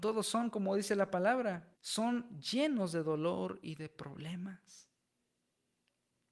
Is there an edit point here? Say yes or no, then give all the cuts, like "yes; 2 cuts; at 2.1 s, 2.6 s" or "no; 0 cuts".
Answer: yes; 1 cut; at 1.8 s